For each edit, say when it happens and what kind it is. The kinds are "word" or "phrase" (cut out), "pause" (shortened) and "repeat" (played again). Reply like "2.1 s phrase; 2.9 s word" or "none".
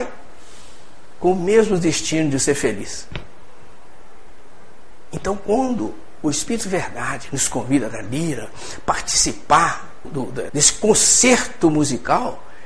7.9 s word; 10.0 s word; 10.5 s word